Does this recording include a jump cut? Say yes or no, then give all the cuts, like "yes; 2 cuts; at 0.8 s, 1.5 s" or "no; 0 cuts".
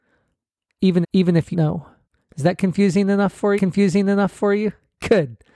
yes; 4 cuts; at 1.0 s, 1.5 s, 2.0 s, 3.6 s